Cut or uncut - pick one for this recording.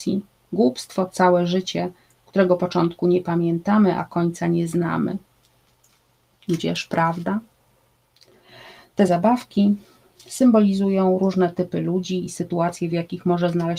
uncut